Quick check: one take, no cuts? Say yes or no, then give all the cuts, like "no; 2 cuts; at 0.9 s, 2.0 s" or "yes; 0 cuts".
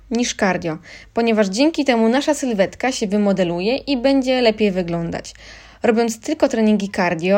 yes; 0 cuts